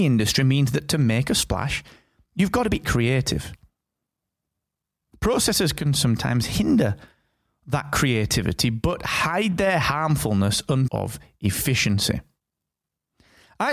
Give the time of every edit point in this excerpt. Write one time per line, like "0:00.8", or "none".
0:02.8
0:10.9